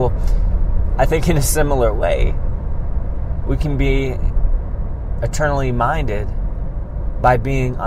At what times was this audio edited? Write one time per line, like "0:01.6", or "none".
none